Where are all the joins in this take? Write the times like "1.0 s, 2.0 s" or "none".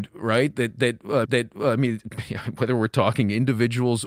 1.2 s